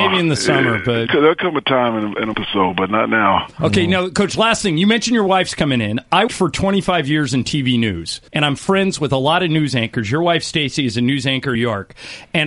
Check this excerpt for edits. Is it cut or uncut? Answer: cut